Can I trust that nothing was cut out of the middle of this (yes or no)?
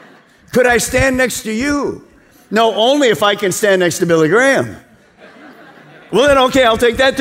yes